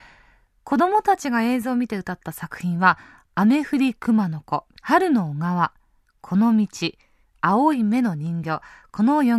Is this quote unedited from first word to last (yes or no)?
no